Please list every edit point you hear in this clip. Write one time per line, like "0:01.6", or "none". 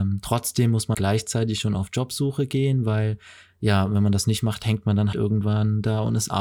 0:00.9
0:05.1